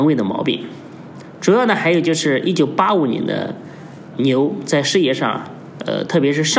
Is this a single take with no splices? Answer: no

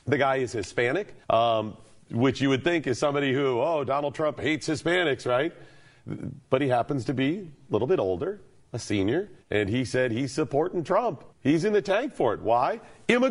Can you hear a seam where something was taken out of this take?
yes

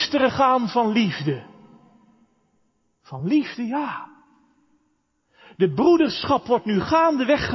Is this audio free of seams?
yes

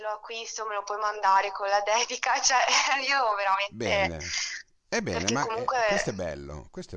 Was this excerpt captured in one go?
yes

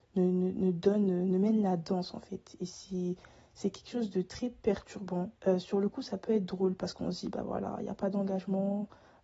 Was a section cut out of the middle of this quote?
yes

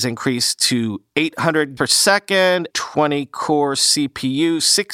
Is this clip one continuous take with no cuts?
no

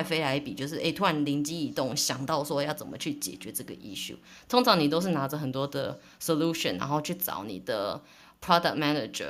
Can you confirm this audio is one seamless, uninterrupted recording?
yes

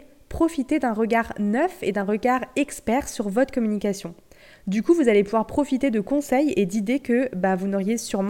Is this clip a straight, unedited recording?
yes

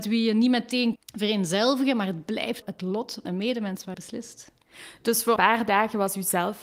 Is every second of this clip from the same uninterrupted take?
no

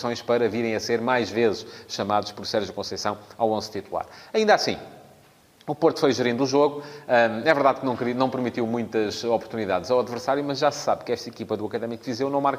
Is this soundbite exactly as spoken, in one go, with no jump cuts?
yes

